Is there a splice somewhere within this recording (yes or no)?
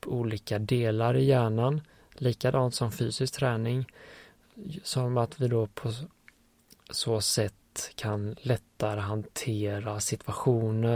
no